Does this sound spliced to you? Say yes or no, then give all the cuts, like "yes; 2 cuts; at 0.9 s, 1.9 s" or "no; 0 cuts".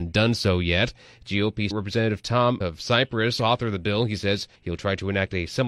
yes; 3 cuts; at 1.7 s, 2.6 s, 4.6 s